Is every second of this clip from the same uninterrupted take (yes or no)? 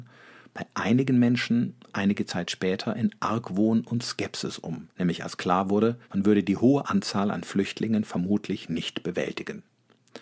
no